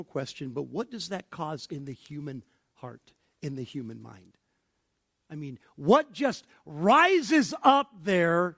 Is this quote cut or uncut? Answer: uncut